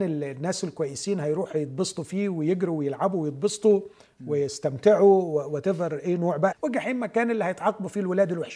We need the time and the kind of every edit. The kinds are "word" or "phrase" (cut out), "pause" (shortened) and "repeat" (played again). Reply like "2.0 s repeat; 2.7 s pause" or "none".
6.5 s word